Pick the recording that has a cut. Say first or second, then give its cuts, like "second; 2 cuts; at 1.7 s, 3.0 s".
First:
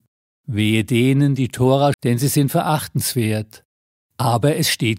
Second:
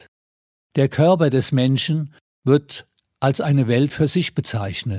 first; 1 cut; at 1.9 s